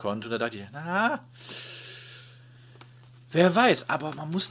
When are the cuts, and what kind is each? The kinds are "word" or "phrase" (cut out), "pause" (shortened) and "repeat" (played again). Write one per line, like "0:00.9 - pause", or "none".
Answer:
none